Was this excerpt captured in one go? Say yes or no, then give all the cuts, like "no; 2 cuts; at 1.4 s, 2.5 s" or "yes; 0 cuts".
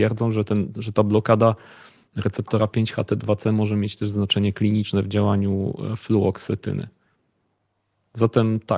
yes; 0 cuts